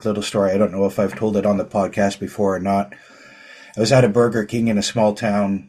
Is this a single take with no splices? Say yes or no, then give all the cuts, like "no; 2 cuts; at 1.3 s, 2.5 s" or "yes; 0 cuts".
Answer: yes; 0 cuts